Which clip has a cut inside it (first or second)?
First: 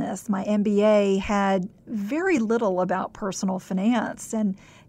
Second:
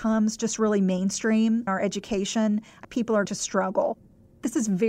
second